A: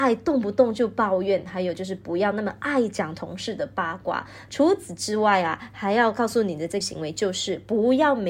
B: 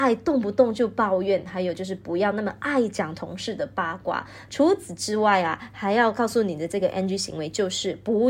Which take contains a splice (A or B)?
A